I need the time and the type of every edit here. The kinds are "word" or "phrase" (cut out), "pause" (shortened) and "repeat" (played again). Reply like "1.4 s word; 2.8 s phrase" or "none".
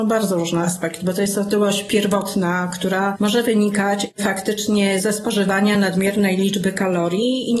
none